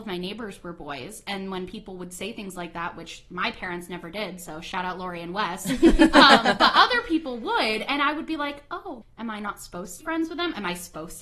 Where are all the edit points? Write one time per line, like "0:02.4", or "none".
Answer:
0:09.0
0:10.0